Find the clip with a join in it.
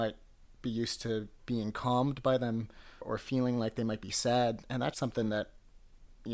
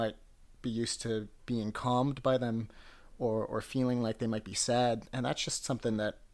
first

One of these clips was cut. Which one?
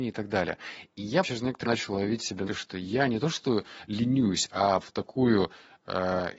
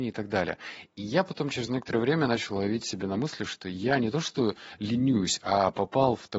first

